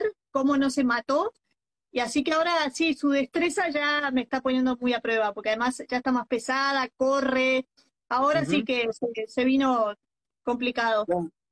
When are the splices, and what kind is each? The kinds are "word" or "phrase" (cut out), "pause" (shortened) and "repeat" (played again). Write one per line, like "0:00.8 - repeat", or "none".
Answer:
none